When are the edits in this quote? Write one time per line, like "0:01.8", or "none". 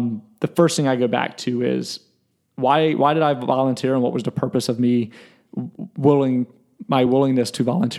none